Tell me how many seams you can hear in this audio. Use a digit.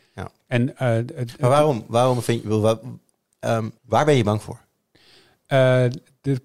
1